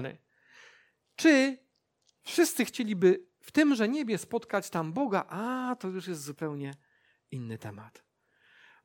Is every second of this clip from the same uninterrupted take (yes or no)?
yes